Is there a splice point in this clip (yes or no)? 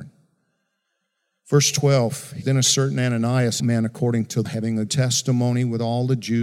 yes